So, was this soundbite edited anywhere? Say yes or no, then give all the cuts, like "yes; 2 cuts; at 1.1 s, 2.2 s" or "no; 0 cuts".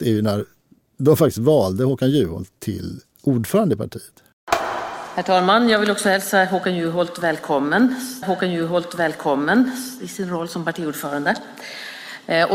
yes; 1 cut; at 8.2 s